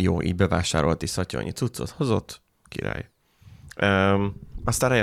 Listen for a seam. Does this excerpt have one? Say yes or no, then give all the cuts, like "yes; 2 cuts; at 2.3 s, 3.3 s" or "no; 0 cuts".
no; 0 cuts